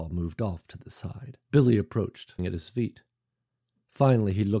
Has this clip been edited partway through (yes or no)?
yes